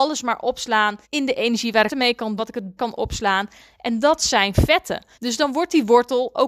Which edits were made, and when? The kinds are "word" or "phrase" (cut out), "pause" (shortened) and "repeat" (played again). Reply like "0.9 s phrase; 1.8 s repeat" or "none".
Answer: 1.0 s pause; 1.9 s phrase; 2.4 s word; 2.8 s word; 5.1 s pause

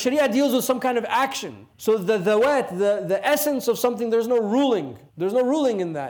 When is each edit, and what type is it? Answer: 1.7 s pause; 5.1 s pause

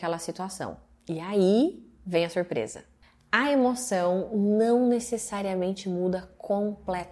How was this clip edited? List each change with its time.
none

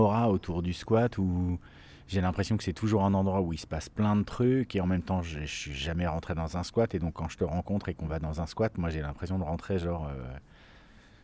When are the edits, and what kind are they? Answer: none

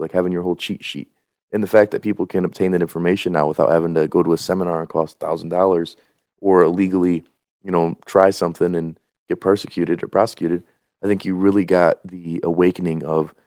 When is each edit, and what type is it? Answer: none

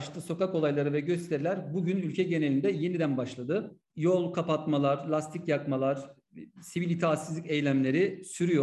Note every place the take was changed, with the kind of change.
none

